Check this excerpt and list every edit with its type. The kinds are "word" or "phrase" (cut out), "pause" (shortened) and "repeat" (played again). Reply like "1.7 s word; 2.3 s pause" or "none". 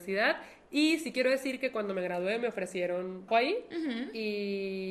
3.3 s word